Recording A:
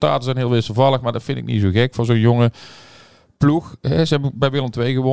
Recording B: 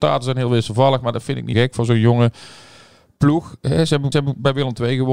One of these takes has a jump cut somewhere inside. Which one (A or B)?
B